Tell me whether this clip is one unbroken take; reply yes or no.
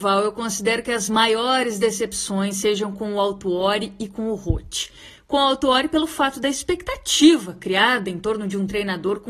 yes